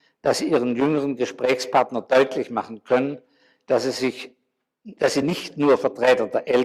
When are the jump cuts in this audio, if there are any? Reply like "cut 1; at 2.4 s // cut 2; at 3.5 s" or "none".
none